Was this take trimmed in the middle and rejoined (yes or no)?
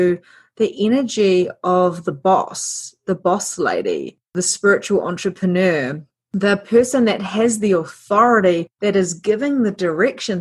no